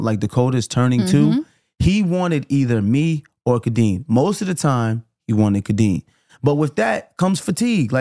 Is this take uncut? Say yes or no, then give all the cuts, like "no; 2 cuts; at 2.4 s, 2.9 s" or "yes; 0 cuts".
yes; 0 cuts